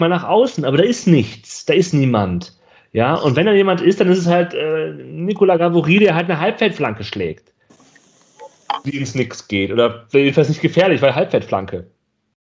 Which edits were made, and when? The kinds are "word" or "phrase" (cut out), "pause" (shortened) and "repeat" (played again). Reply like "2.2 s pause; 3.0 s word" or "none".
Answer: none